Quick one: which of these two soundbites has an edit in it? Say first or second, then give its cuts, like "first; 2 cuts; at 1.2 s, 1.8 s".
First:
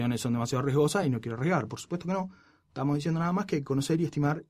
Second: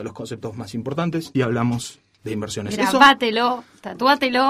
second; 1 cut; at 1.3 s